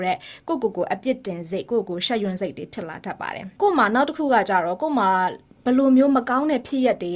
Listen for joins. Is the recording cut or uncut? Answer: uncut